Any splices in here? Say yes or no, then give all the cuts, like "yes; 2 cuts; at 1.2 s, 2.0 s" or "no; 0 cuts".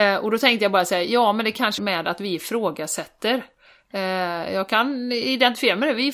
yes; 1 cut; at 1.8 s